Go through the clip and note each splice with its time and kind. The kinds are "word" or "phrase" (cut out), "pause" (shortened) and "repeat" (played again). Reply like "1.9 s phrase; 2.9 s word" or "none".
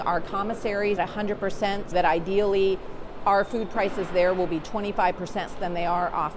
1.0 s word; 1.9 s word; 5.5 s word